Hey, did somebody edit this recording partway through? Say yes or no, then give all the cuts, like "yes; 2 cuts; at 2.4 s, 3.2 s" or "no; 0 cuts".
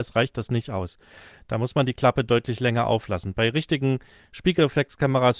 no; 0 cuts